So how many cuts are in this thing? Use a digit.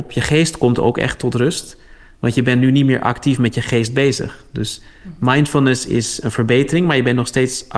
0